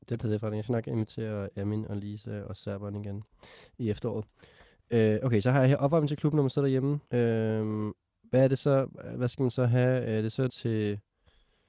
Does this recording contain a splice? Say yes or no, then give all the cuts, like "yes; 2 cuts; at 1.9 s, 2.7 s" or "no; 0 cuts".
yes; 2 cuts; at 7.0 s, 10.5 s